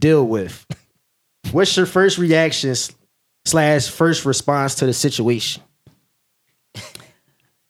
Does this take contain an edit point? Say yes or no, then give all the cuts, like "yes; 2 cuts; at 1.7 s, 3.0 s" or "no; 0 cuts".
no; 0 cuts